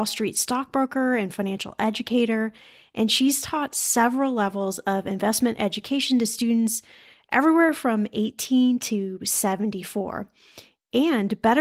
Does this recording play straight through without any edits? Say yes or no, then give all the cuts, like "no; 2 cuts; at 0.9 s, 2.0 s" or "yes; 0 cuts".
yes; 0 cuts